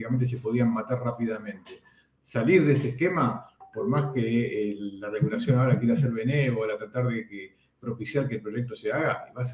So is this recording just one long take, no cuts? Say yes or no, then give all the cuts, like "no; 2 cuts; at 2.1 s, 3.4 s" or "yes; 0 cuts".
yes; 0 cuts